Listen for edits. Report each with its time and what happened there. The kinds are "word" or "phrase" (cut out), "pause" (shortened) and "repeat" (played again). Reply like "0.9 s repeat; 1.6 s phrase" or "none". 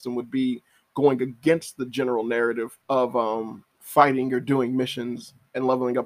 2.8 s pause; 3.7 s pause